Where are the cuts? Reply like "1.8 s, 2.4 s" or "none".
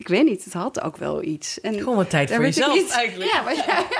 none